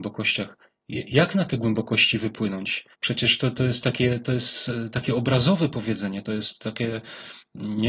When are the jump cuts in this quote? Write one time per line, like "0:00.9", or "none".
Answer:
0:02.9